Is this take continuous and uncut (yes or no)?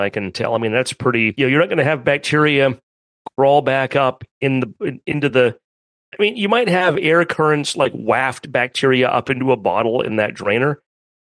yes